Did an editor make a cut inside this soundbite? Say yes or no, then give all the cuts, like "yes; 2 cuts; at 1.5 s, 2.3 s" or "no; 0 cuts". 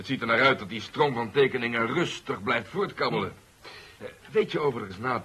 yes; 1 cut; at 4.2 s